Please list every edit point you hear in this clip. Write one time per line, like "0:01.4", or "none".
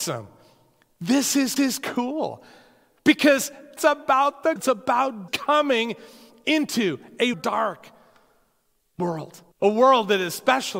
0:01.6
0:03.8
0:04.6
0:05.3
0:07.3
0:09.5